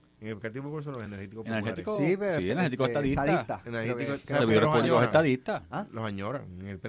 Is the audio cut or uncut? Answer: uncut